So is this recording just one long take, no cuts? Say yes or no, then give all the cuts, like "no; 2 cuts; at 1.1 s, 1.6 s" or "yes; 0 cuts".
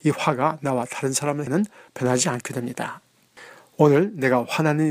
no; 2 cuts; at 1.5 s, 1.9 s